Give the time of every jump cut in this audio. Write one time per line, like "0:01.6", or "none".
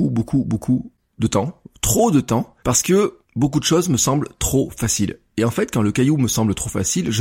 0:02.6
0:03.2